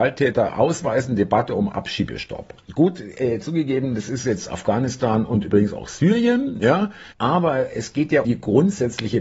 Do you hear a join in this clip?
yes; 2 cuts; at 7.1 s, 8.2 s

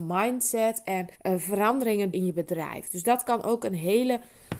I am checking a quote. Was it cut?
yes; 2 cuts; at 1.1 s, 2.1 s

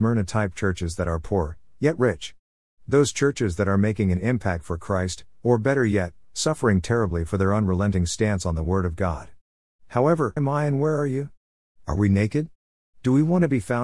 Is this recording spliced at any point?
yes; 1 cut; at 10.4 s

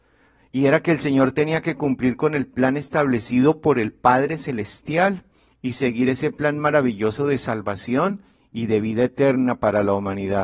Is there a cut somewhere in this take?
no; 0 cuts

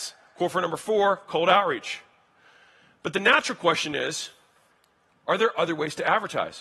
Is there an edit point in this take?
no; 0 cuts

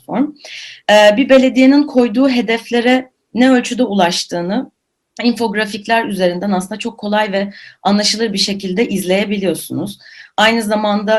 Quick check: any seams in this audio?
no; 0 cuts

